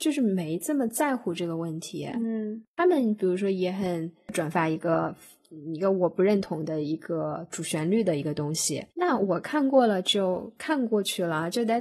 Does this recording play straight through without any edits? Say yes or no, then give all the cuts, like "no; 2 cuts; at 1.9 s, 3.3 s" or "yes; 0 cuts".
no; 1 cut; at 8.9 s